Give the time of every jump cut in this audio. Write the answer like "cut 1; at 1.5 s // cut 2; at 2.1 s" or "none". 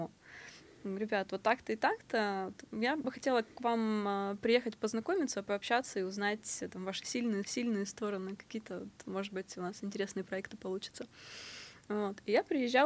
cut 1; at 3.0 s // cut 2; at 7.4 s